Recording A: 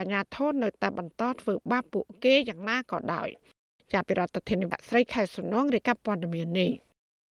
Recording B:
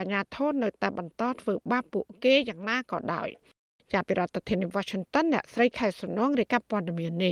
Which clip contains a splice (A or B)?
A